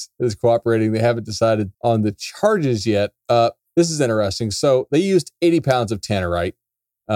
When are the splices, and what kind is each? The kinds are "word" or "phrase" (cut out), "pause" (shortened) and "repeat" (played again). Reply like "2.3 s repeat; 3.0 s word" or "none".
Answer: 1.7 s pause; 3.6 s pause